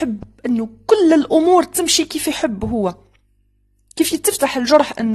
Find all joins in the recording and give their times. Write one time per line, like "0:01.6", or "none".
none